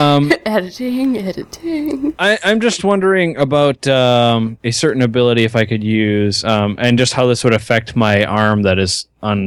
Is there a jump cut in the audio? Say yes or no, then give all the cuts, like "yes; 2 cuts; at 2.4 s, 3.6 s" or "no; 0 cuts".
no; 0 cuts